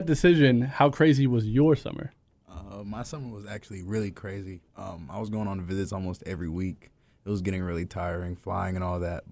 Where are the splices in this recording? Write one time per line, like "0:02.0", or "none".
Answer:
none